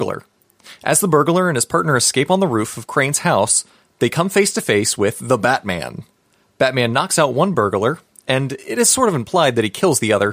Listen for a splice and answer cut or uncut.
uncut